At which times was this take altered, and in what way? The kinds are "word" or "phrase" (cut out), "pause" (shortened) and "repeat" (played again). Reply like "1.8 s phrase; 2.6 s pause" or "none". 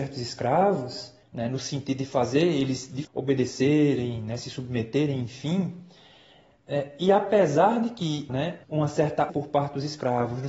1.2 s pause; 3.0 s word; 8.3 s word; 8.6 s pause; 9.3 s word